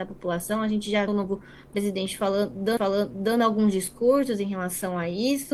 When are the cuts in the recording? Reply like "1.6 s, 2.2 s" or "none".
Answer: 1.1 s, 2.8 s